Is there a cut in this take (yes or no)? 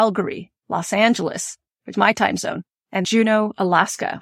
yes